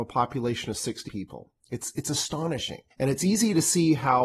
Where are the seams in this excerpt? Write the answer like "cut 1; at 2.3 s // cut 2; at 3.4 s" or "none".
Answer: cut 1; at 1.1 s // cut 2; at 1.6 s // cut 3; at 2.9 s